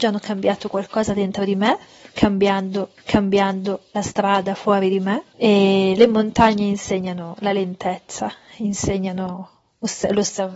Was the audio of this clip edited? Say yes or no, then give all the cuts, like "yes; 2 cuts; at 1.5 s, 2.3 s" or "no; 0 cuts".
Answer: yes; 1 cut; at 3.0 s